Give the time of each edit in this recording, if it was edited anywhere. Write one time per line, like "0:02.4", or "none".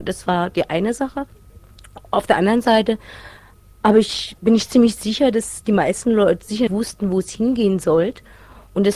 0:06.7